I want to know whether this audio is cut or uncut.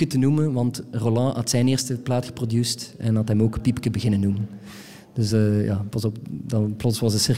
uncut